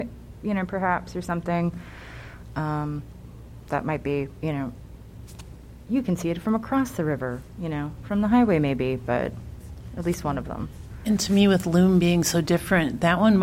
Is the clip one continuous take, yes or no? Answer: yes